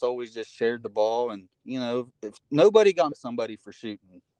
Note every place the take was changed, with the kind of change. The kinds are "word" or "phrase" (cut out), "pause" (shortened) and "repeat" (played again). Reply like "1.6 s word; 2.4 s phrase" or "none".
1.5 s pause; 2.1 s pause; 3.1 s word